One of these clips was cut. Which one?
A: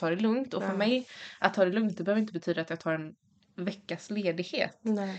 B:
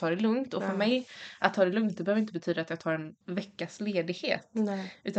B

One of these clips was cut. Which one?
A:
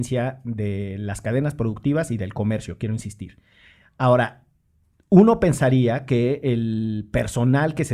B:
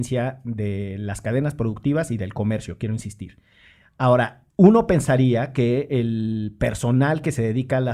B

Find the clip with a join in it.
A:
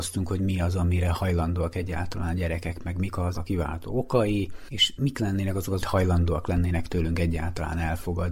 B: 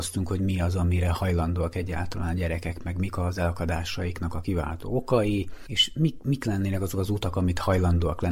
A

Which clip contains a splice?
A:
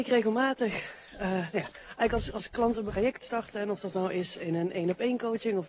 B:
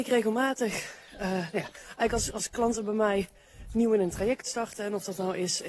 A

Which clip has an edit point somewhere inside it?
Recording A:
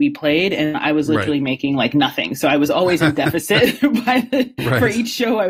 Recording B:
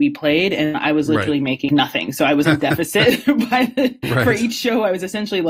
B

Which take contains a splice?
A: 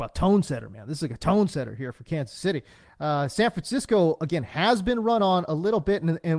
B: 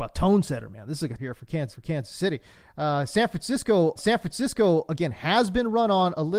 B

